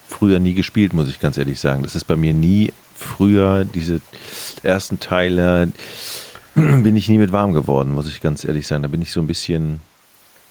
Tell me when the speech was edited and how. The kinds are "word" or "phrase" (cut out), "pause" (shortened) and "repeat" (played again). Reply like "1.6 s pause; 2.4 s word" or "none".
none